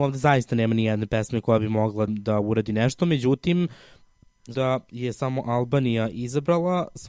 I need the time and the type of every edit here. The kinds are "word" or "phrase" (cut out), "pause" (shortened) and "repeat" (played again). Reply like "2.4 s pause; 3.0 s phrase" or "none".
2.1 s word; 4.5 s word